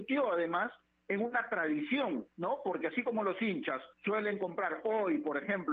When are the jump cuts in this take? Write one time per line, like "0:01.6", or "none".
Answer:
0:02.3
0:03.9